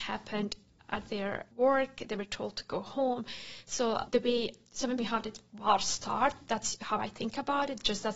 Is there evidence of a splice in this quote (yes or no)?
yes